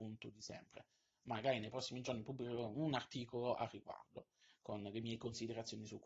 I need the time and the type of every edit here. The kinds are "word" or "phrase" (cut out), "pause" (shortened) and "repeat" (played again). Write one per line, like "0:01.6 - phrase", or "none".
none